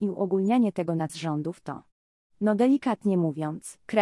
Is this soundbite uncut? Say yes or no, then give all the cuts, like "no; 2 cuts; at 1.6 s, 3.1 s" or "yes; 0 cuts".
no; 1 cut; at 1.1 s